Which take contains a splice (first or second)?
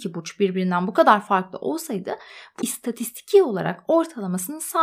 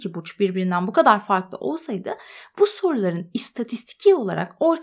first